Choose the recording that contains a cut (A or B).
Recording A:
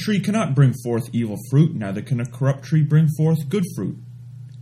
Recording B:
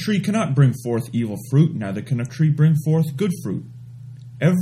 B